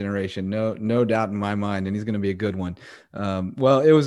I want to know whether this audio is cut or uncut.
uncut